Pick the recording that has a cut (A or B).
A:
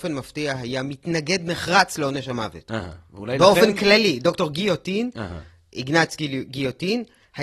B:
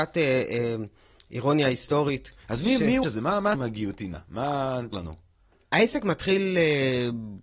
B